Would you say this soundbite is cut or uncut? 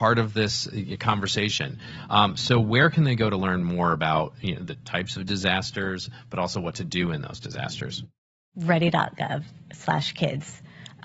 uncut